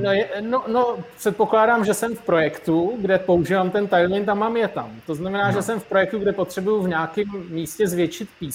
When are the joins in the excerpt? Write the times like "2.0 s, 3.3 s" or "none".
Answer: none